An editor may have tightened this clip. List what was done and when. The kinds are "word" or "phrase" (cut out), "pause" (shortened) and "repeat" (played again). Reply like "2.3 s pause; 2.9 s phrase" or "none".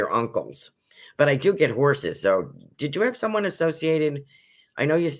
none